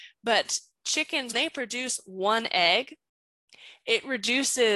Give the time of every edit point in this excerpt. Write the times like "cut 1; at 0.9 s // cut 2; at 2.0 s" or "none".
cut 1; at 1.3 s